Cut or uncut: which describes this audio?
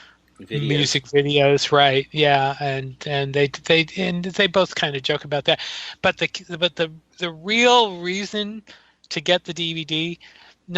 uncut